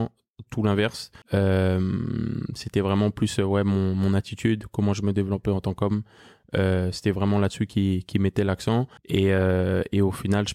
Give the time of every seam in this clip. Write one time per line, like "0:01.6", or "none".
0:01.2
0:09.0